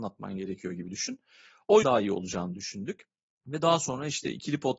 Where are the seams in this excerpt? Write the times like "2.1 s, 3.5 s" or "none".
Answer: 1.8 s